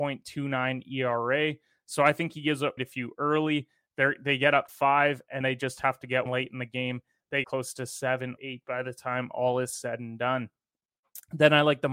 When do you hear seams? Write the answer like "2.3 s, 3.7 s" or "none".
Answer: 2.8 s, 4.7 s, 5.4 s, 6.3 s, 7.4 s, 8.4 s